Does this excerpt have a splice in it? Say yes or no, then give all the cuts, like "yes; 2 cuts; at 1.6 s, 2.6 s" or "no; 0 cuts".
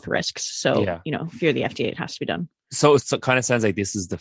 yes; 1 cut; at 3.0 s